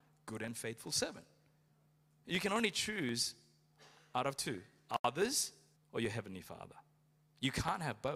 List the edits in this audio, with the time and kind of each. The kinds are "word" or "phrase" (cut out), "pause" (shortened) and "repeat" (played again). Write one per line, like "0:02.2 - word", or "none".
0:05.8 - pause